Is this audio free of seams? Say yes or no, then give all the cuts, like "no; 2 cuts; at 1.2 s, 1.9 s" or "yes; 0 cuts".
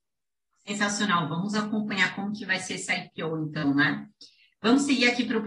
yes; 0 cuts